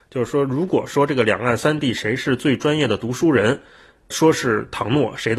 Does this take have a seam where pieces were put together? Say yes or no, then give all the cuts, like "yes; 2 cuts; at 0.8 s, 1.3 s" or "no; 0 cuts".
no; 0 cuts